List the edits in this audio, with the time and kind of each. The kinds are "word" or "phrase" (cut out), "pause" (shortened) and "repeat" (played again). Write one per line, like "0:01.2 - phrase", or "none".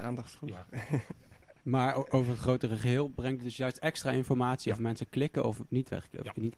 none